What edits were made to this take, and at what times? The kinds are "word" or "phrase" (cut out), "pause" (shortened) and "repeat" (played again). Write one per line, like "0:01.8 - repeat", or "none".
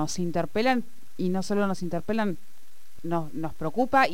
0:03.0 - word